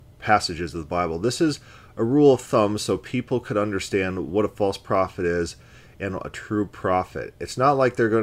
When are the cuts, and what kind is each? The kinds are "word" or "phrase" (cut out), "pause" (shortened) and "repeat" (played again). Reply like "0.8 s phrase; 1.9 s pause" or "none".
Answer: none